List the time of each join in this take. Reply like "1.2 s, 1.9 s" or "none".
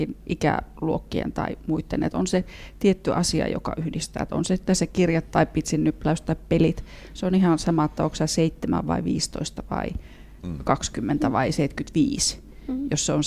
none